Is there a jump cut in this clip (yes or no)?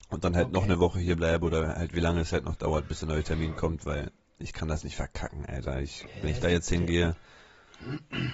no